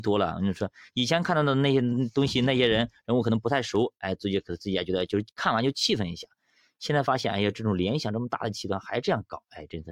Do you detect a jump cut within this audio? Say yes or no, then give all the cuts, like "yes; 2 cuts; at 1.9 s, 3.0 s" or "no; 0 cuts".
no; 0 cuts